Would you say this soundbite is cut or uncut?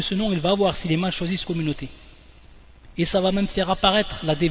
cut